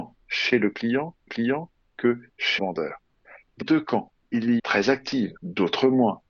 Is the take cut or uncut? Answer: cut